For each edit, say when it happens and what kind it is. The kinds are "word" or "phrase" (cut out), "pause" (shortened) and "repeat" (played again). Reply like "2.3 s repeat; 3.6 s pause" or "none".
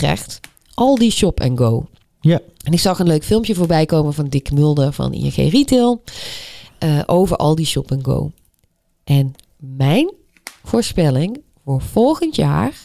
none